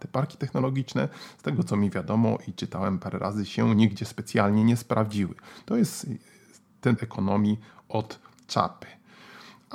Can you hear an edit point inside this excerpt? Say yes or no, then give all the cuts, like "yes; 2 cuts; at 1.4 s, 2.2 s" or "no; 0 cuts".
yes; 1 cut; at 7.0 s